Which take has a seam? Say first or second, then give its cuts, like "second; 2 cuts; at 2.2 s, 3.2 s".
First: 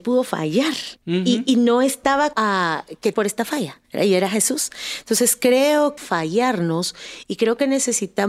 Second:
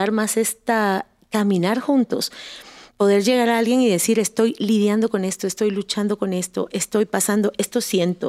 first; 5 cuts; at 1.0 s, 2.3 s, 3.1 s, 3.8 s, 6.0 s